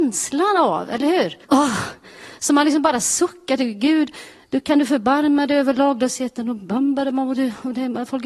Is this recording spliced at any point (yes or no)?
yes